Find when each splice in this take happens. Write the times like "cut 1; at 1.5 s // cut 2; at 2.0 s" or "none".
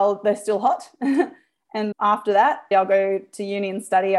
cut 1; at 1.9 s // cut 2; at 2.7 s